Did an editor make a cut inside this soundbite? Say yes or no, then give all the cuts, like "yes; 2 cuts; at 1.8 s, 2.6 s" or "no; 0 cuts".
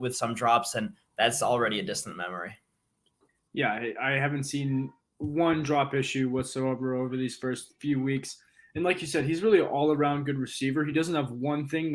no; 0 cuts